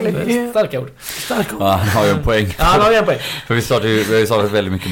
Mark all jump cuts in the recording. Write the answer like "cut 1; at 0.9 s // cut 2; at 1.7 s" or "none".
none